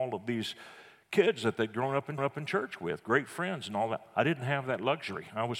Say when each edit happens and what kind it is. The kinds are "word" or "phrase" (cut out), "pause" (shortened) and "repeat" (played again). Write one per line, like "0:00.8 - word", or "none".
0:02.2 - repeat